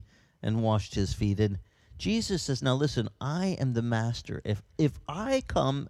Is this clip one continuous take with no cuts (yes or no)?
yes